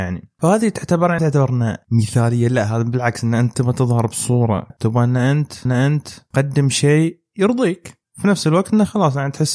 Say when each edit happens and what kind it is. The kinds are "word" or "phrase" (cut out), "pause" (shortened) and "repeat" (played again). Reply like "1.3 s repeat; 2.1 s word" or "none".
1.2 s word; 4.7 s word; 5.7 s repeat